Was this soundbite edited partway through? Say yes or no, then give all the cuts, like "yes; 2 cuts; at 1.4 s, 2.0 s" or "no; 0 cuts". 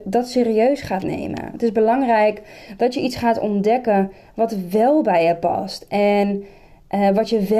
no; 0 cuts